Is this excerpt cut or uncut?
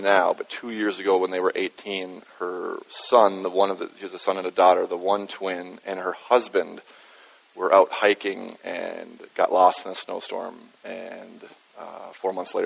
uncut